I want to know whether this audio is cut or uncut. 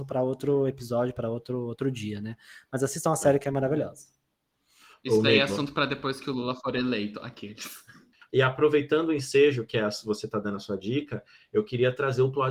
uncut